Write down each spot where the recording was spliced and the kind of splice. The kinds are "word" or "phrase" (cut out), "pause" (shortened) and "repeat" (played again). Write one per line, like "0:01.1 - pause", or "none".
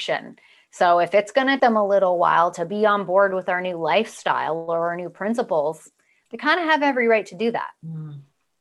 0:01.6 - word